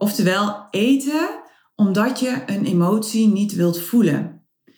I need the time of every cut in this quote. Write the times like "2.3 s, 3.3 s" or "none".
none